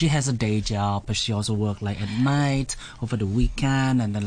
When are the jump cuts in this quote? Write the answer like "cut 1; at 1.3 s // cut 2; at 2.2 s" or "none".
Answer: none